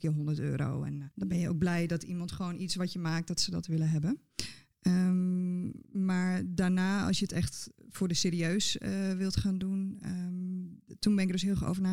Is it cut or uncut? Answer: cut